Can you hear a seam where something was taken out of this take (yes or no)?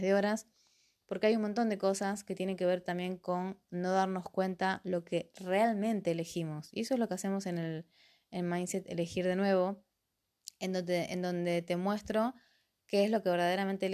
no